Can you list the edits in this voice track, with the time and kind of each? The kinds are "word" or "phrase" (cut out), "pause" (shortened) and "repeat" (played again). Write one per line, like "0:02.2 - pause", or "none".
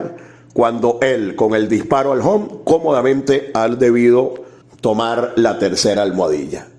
0:04.6 - pause